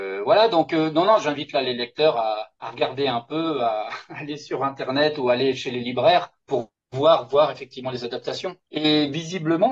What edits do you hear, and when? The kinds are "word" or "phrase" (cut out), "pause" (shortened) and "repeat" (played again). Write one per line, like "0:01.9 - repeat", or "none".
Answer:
0:02.5 - pause
0:06.4 - pause
0:08.7 - pause